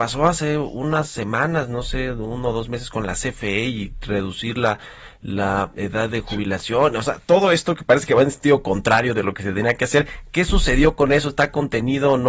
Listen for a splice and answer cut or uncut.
uncut